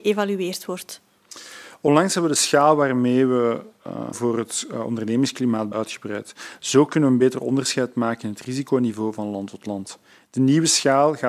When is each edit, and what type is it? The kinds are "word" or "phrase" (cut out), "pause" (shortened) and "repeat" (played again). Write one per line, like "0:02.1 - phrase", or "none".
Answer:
0:04.1 - phrase
0:05.7 - word